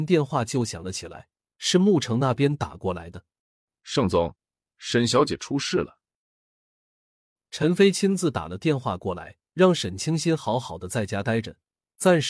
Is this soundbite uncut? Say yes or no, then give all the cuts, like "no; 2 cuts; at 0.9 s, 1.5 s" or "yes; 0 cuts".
no; 2 cuts; at 3.4 s, 9.5 s